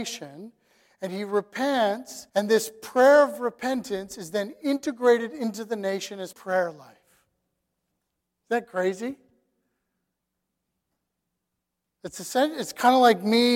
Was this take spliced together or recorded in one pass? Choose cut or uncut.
cut